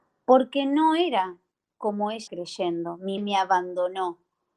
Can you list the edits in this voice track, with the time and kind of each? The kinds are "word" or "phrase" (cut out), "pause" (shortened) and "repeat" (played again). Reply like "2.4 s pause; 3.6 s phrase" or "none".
2.3 s word; 3.2 s word